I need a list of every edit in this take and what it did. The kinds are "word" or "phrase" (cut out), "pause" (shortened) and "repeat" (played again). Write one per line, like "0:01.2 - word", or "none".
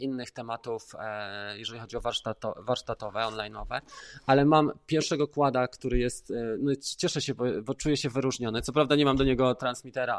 none